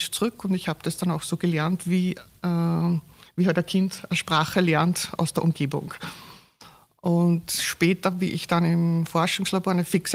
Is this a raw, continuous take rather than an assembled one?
yes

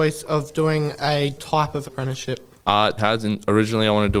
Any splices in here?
yes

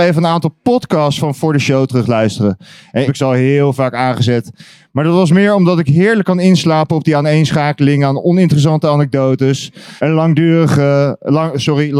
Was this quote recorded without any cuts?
no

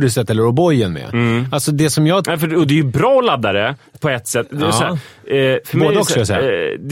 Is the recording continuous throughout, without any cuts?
yes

